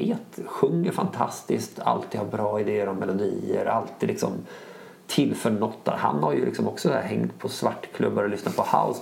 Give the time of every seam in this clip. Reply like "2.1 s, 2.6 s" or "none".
none